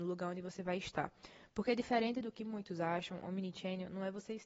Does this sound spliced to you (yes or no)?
no